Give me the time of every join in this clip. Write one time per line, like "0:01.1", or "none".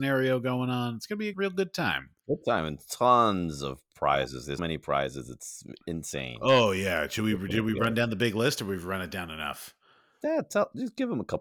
0:01.3
0:04.6

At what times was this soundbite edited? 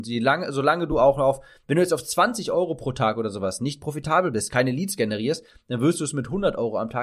none

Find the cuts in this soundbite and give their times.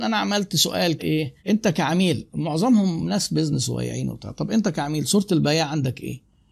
0:01.0
0:01.4

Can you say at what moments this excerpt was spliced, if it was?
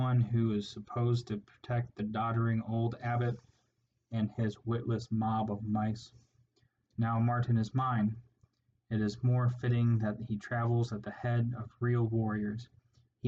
none

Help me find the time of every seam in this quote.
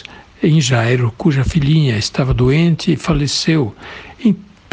none

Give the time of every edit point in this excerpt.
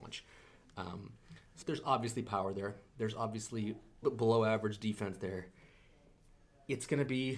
0:01.6
0:04.0

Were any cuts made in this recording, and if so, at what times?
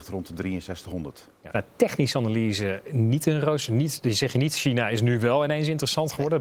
0:01.5

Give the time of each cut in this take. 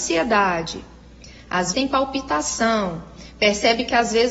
0:01.7

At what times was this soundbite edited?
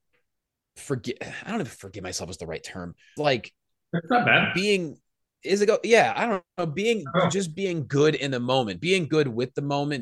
0:03.2

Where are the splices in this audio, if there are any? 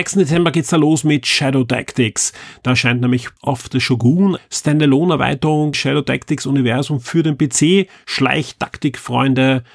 0:03.4
0:04.4
0:05.7

